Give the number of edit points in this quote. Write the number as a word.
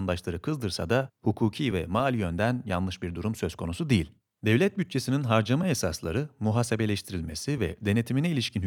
zero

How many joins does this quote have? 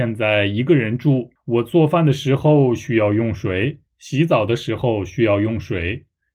two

